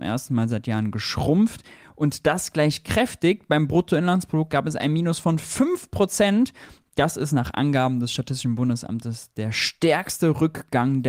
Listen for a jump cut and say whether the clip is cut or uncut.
uncut